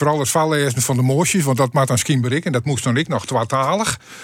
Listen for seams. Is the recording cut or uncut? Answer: uncut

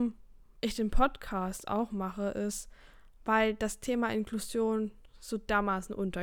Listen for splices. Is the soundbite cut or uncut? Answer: uncut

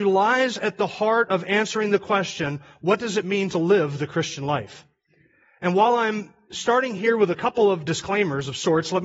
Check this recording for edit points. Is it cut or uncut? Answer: uncut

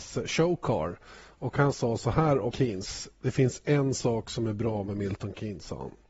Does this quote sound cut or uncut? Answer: cut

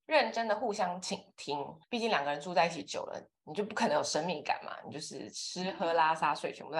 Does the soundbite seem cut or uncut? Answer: cut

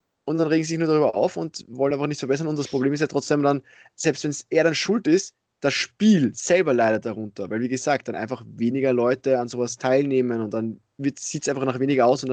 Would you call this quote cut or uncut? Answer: uncut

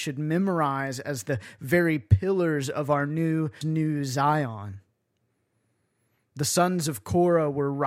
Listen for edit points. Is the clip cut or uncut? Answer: cut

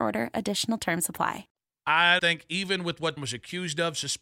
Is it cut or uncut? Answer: cut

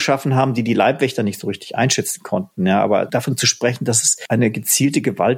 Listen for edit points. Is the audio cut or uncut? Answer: uncut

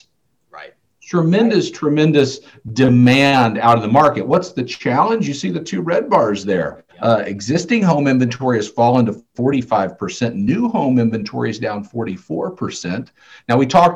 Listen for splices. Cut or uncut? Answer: cut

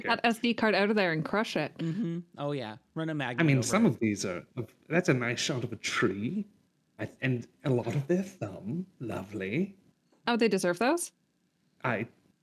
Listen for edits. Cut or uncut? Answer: uncut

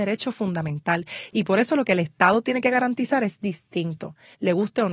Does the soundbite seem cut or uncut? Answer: uncut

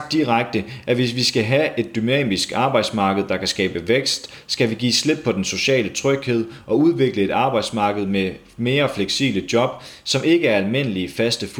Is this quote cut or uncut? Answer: uncut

